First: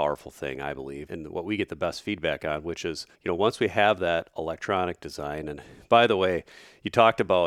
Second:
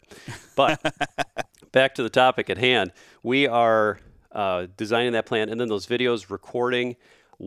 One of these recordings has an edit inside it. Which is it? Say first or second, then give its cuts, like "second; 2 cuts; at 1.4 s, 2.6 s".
first; 2 cuts; at 1.1 s, 3.1 s